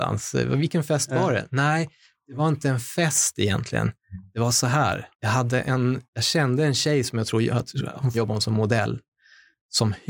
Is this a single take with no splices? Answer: no; 3 cuts; at 5.1 s, 6.0 s, 8.1 s

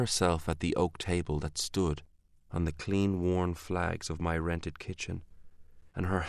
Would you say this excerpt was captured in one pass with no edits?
yes; 0 cuts

